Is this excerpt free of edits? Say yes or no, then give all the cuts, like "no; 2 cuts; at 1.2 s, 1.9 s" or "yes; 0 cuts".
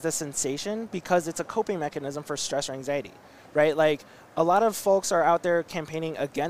yes; 0 cuts